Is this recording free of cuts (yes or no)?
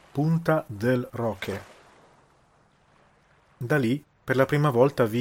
yes